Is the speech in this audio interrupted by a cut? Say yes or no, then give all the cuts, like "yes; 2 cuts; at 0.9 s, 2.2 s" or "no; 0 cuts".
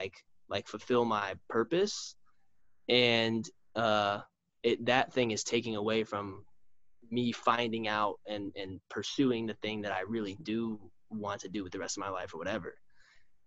no; 0 cuts